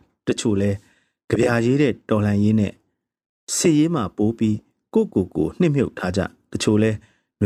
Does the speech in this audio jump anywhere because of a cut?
no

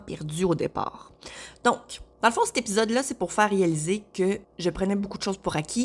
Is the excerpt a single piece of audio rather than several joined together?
no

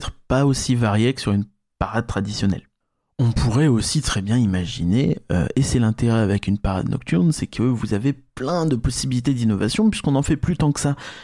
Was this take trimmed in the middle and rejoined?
no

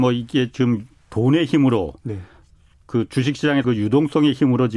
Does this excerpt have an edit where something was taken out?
yes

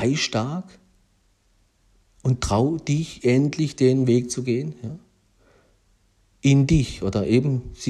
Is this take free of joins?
yes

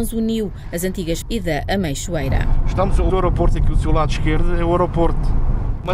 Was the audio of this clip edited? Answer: yes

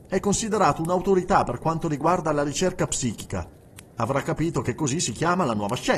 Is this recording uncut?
yes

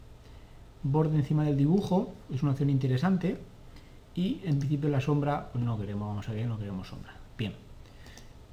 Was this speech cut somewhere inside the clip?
no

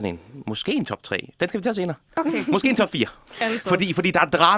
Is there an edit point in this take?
no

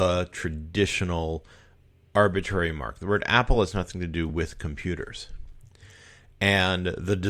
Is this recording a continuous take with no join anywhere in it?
yes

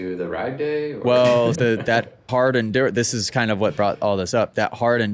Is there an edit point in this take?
yes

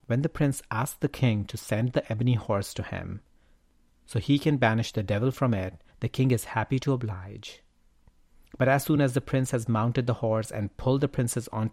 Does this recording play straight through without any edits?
yes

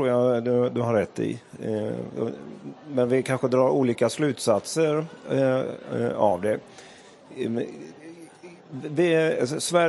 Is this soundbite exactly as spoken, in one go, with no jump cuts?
yes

